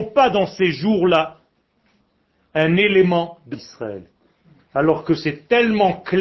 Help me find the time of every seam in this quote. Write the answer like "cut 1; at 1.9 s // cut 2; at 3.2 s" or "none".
cut 1; at 3.5 s